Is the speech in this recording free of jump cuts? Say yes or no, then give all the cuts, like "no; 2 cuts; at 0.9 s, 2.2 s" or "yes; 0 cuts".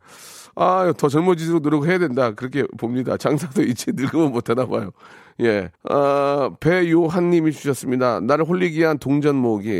no; 1 cut; at 5.8 s